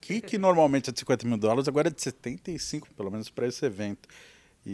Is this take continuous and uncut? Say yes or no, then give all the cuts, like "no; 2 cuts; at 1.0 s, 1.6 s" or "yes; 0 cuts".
no; 1 cut; at 2.8 s